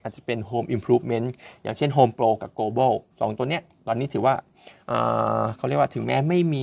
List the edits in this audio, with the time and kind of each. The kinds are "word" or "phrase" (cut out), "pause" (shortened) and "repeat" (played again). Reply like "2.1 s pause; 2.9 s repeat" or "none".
3.1 s pause